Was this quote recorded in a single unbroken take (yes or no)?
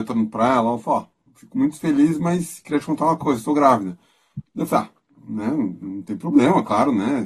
yes